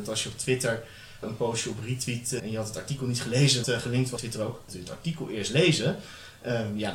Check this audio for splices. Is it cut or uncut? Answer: cut